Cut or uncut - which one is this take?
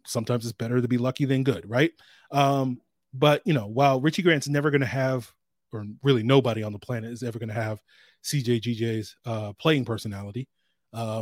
uncut